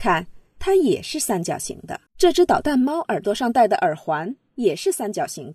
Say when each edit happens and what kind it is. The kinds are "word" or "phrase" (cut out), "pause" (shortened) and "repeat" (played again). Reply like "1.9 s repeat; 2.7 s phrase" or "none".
2.1 s pause

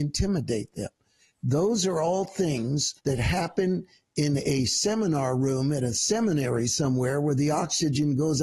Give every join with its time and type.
3.0 s pause

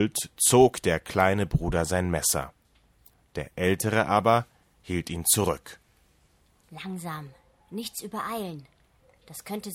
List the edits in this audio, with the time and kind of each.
none

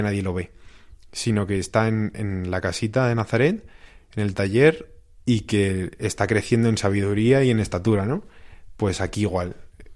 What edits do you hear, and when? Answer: none

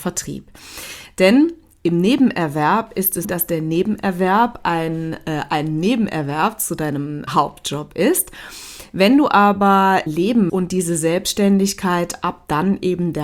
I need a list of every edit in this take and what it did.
3.2 s word; 7.3 s word; 10.1 s word; 10.5 s word

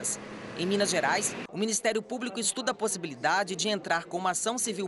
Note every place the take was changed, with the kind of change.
none

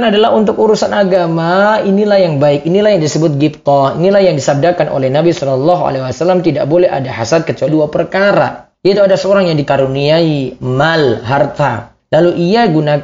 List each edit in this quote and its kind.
7.7 s word

